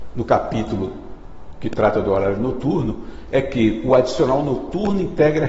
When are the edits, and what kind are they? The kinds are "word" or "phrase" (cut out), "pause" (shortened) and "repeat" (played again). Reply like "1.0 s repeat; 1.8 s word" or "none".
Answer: none

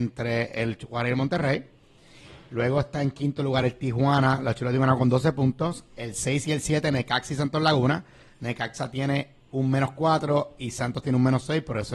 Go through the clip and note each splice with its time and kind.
none

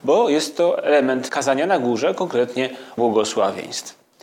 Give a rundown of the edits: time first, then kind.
1.3 s word; 3.0 s word

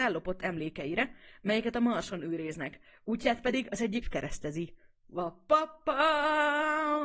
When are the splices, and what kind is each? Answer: 4.0 s phrase

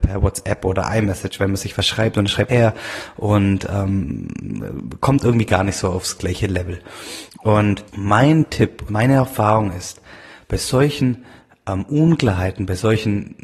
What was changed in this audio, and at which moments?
2.5 s phrase; 7.9 s pause; 8.9 s phrase

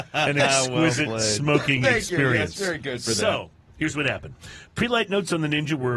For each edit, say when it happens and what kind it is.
none

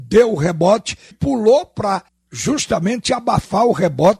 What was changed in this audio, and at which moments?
1.1 s word; 2.1 s pause

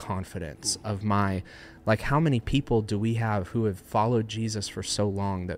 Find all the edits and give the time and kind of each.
none

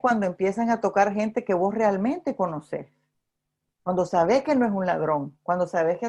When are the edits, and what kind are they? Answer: none

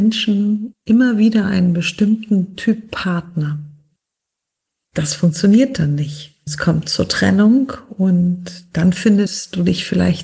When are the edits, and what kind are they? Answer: none

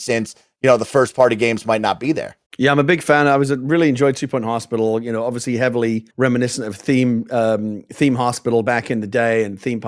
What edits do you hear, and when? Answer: 2.5 s pause; 6.1 s pause

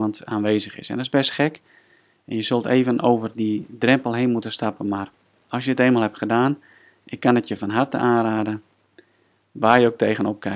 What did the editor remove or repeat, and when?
none

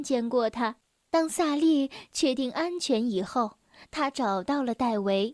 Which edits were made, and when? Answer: none

